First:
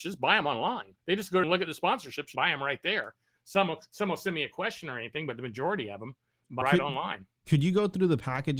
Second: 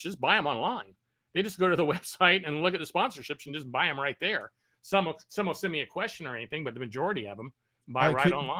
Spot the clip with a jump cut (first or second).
first